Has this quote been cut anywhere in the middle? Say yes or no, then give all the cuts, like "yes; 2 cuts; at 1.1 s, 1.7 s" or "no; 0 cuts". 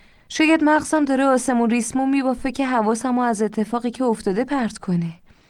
no; 0 cuts